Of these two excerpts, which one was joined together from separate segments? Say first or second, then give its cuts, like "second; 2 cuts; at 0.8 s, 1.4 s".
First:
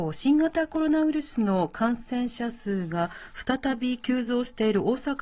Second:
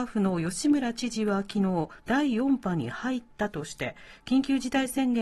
second; 1 cut; at 2.0 s